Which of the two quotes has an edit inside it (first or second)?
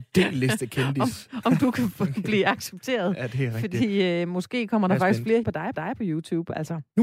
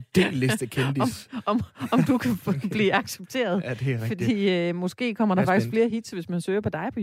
first